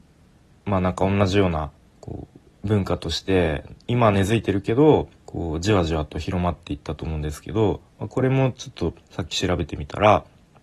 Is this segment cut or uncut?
cut